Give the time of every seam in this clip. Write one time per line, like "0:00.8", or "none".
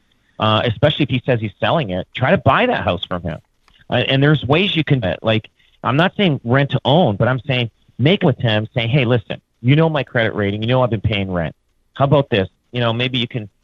0:05.0
0:08.2